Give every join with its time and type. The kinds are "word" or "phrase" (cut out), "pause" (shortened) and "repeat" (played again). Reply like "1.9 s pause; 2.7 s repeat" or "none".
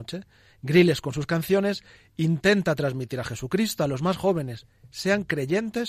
none

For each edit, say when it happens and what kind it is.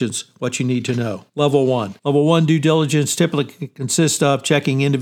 1.3 s pause; 2.0 s pause

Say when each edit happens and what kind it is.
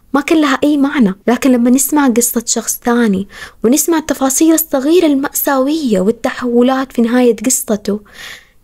1.2 s pause

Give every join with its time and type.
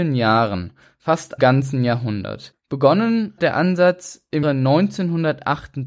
1.4 s word; 3.4 s word; 4.4 s word

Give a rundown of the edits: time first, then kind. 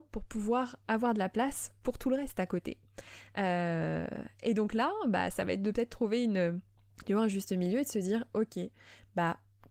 6.8 s pause

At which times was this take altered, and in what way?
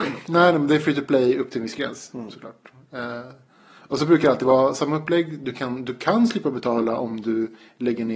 none

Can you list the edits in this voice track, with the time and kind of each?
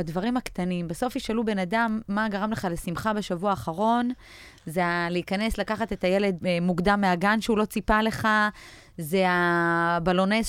6.4 s word

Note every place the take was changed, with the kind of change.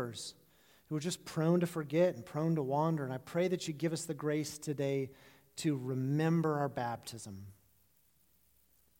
none

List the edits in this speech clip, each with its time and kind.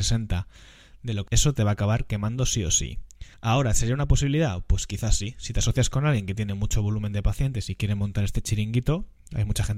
1.3 s word; 3.3 s pause

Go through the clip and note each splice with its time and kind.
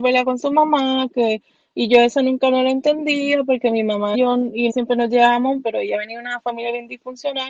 4.1 s word; 4.7 s word; 5.6 s word

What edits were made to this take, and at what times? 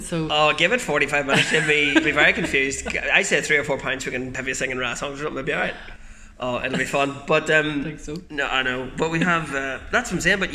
2.0 s word; 4.3 s word

